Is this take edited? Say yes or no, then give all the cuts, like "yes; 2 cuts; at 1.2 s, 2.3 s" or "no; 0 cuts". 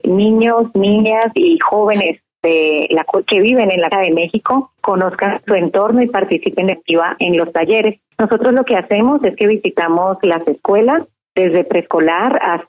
yes; 2 cuts; at 3.9 s, 6.7 s